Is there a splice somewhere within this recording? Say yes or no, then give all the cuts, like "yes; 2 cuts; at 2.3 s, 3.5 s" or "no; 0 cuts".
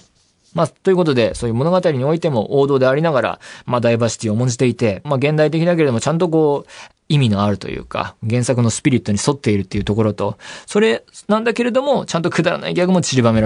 yes; 2 cuts; at 5.0 s, 7.0 s